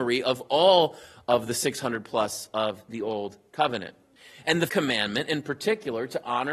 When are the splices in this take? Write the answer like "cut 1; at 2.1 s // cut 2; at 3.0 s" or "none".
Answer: cut 1; at 2.5 s // cut 2; at 4.2 s // cut 3; at 4.7 s

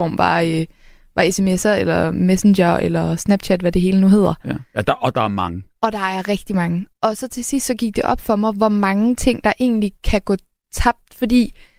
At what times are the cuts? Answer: none

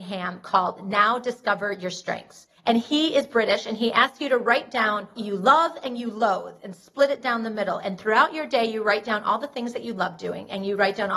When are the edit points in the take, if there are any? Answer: cut 1; at 2.6 s // cut 2; at 5.2 s

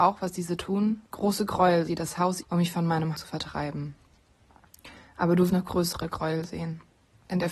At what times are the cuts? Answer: cut 1; at 1.1 s // cut 2; at 1.9 s // cut 3; at 2.4 s // cut 4; at 3.1 s // cut 5; at 5.5 s

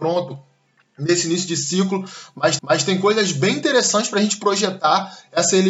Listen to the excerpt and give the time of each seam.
cut 1; at 2.6 s

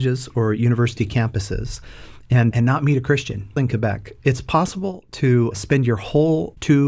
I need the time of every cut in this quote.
cut 1; at 2.5 s // cut 2; at 3.6 s

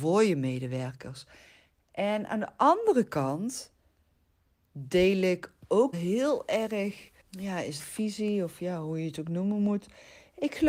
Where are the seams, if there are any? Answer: cut 1; at 5.9 s // cut 2; at 7.2 s // cut 3; at 7.8 s

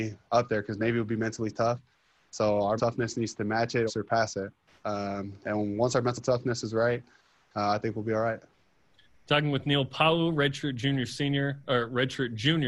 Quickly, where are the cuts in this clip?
cut 1; at 2.8 s // cut 2; at 3.9 s

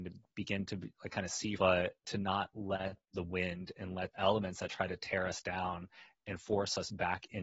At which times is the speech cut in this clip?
cut 1; at 1.6 s // cut 2; at 2.0 s // cut 3; at 4.1 s

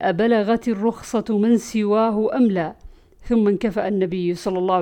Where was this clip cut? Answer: none

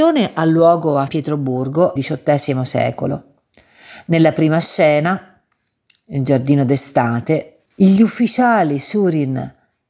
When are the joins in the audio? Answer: cut 1; at 1.1 s // cut 2; at 2.0 s // cut 3; at 7.7 s

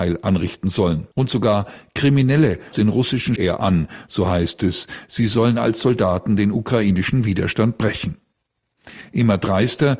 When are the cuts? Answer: cut 1; at 1.1 s // cut 2; at 2.7 s // cut 3; at 3.4 s

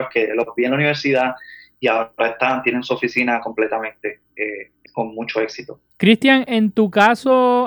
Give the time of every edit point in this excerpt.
cut 1; at 5.9 s

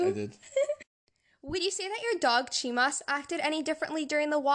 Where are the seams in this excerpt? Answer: none

